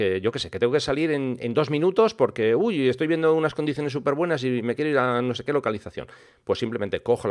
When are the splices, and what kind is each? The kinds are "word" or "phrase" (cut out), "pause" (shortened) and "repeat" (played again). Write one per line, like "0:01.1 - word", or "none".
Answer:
none